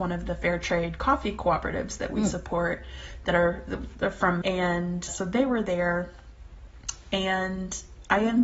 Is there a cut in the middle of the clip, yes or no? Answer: yes